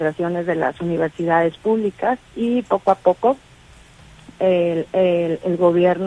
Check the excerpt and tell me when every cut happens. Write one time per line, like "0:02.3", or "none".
0:02.3
0:04.9